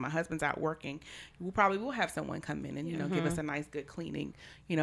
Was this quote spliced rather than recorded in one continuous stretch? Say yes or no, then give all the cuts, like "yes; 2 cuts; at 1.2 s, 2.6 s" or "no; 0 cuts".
no; 0 cuts